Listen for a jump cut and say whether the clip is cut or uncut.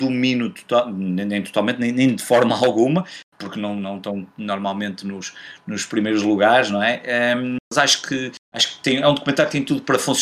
cut